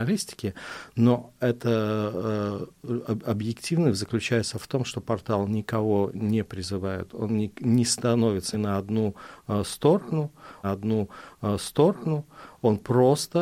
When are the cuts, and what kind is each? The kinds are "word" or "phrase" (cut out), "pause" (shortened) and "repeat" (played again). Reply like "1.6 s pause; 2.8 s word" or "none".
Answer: 8.5 s word; 10.6 s repeat